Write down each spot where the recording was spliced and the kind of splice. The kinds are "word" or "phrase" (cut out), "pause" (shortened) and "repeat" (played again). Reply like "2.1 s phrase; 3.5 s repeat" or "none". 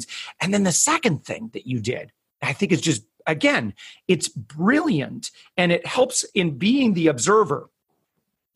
none